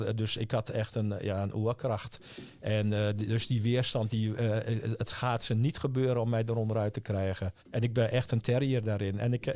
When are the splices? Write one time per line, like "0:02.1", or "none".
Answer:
0:07.6

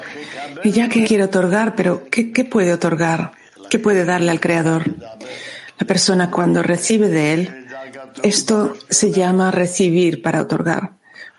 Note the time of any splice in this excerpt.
0:01.0
0:06.3

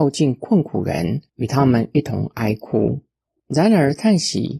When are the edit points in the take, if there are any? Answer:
0:01.3

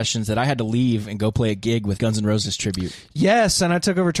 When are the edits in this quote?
0:02.0

